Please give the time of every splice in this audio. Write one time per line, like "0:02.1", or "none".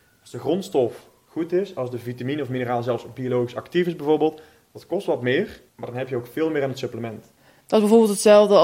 0:05.7